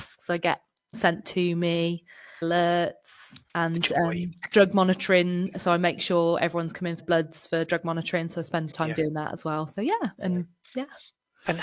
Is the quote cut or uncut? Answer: cut